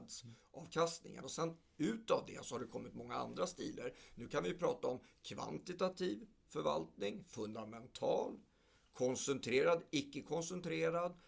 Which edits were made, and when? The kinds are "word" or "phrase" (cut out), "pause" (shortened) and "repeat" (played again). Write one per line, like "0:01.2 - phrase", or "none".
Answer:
none